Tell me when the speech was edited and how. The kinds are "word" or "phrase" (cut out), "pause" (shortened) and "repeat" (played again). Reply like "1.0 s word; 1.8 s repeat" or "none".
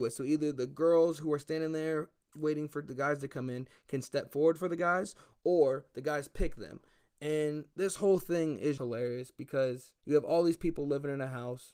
8.8 s word; 10.0 s pause